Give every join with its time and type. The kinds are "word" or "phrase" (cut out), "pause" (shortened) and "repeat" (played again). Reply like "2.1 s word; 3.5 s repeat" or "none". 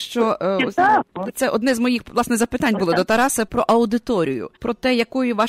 3.5 s word; 4.6 s pause